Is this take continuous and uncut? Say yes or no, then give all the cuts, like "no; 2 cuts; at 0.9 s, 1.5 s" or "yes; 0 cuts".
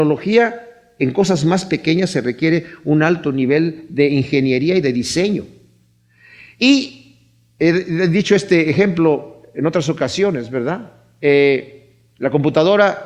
yes; 0 cuts